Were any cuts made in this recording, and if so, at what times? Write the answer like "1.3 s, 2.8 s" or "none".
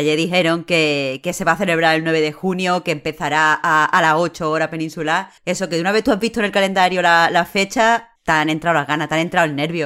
5.4 s, 8.2 s